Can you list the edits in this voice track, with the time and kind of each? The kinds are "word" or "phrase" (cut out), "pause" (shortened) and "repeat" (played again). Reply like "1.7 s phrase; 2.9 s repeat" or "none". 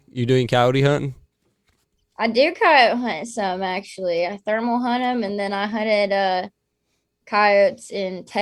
none